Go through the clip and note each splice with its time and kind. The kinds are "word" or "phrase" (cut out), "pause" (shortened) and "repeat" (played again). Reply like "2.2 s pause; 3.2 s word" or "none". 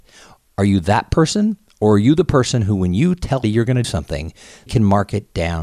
3.4 s word; 3.8 s word; 4.7 s word